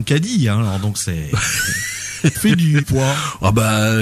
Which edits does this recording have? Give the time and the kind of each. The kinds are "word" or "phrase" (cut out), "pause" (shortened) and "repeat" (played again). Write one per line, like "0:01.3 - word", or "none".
0:02.3 - word
0:02.8 - word